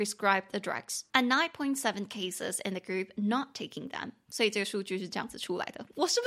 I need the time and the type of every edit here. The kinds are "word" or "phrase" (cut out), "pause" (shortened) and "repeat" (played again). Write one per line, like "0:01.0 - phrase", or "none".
0:01.1 - pause